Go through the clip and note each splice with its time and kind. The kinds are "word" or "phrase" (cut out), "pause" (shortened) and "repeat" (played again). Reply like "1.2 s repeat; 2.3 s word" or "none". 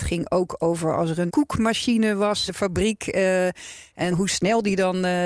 1.3 s word; 2.5 s word; 4.1 s word